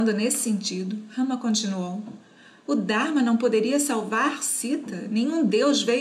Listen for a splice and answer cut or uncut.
uncut